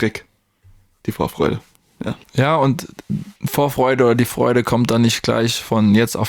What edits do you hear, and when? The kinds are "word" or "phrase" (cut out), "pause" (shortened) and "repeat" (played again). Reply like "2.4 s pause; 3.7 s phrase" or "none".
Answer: 2.2 s pause; 3.4 s pause